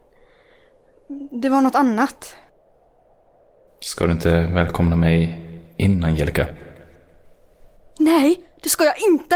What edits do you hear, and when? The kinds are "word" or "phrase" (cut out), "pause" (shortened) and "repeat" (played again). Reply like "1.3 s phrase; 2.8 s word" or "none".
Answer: none

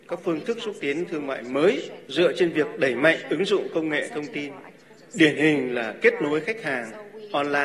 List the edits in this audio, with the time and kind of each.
2.0 s pause

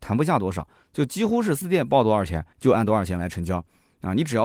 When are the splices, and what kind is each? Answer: 1.6 s word; 2.5 s pause

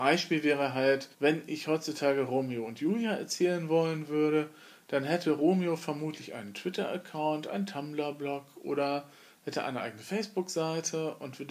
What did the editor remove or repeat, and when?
1.1 s pause

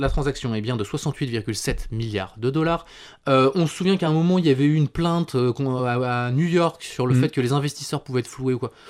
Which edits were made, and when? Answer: none

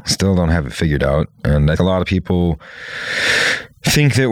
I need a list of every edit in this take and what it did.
1.8 s word

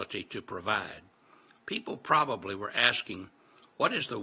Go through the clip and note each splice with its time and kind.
none

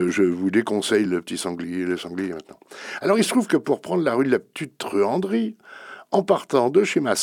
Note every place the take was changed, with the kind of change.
none

